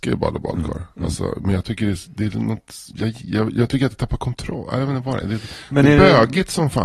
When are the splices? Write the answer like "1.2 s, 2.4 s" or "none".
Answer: 2.9 s